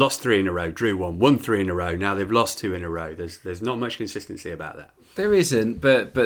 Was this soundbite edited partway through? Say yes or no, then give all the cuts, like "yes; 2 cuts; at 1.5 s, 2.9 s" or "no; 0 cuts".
no; 0 cuts